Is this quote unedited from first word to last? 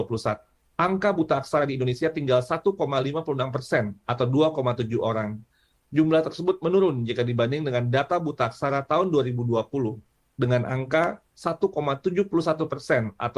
yes; 0 cuts

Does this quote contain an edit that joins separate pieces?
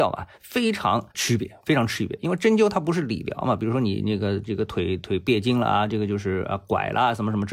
yes; 1 cut; at 1.1 s

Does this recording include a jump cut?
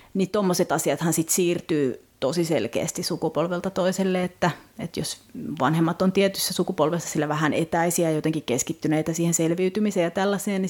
no; 0 cuts

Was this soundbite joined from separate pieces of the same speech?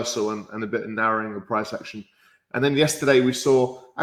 no; 0 cuts

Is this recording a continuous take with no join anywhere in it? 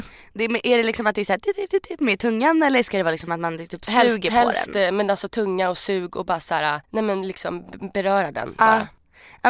no; 1 cut; at 6.8 s

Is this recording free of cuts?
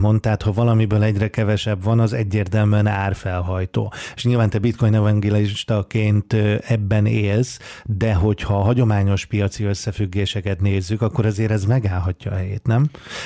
yes; 0 cuts

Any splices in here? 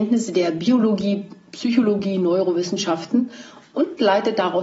no; 0 cuts

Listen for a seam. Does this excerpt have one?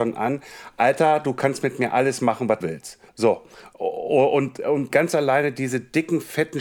yes; 3 cuts; at 2.6 s, 3.1 s, 4.9 s

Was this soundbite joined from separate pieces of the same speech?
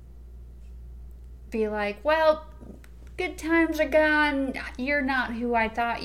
no; 0 cuts

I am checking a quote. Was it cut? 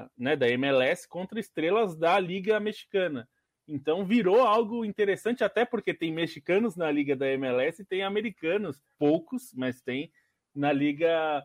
no; 0 cuts

